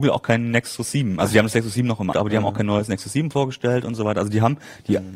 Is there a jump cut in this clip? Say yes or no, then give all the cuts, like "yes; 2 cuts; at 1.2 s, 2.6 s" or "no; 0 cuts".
yes; 1 cut; at 2.1 s